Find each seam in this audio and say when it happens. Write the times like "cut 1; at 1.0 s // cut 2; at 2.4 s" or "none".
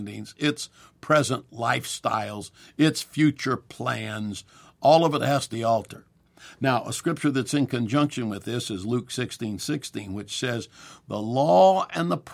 cut 1; at 5.5 s